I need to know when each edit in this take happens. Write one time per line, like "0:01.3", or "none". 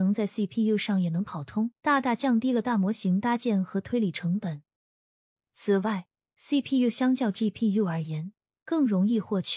0:01.8